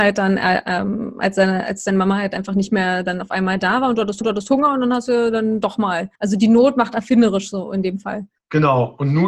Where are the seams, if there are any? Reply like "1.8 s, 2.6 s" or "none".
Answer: 4.2 s, 6.1 s, 8.4 s